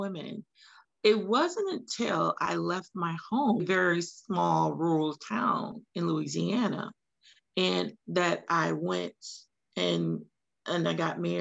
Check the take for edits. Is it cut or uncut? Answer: cut